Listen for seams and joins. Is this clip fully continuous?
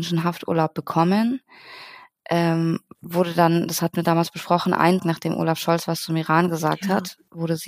no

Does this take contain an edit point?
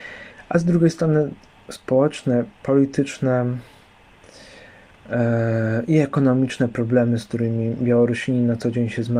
yes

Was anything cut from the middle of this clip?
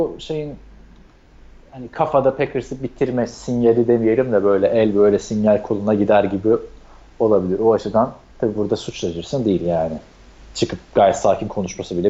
no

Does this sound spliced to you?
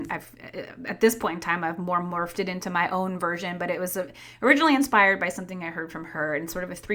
no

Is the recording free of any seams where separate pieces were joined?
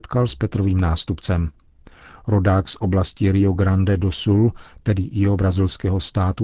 yes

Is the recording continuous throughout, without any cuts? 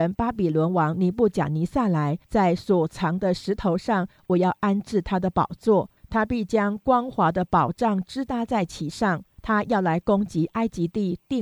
no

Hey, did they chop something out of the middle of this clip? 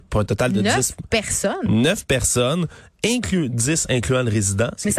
yes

